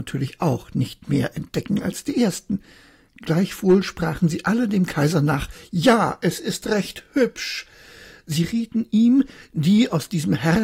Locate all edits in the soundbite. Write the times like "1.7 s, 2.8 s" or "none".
none

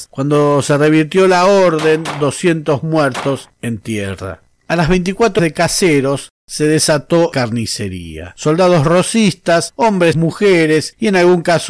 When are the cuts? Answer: 3.5 s, 5.4 s, 7.3 s, 10.1 s

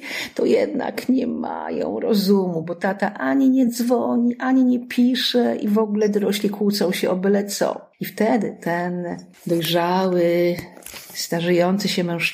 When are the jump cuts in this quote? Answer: none

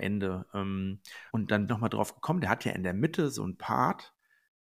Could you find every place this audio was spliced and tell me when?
1.3 s, 1.7 s

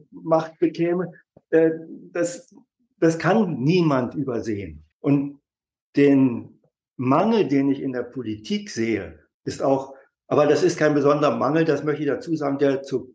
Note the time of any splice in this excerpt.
4.9 s, 6.8 s, 9.3 s

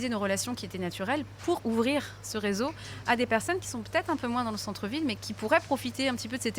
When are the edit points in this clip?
1.6 s, 5.2 s

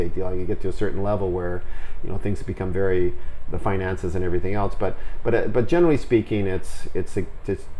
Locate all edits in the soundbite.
none

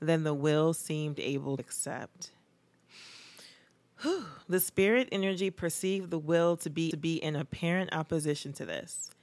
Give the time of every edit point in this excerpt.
1.6 s, 4.4 s, 6.9 s

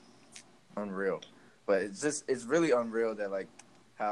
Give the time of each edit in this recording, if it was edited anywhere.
none

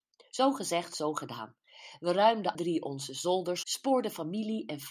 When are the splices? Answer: 2.5 s, 3.6 s

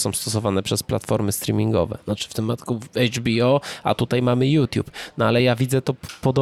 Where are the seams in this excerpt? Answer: none

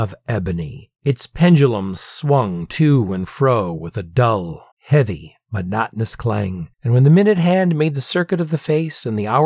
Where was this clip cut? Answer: 4.7 s, 6.7 s

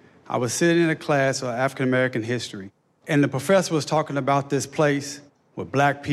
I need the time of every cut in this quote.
none

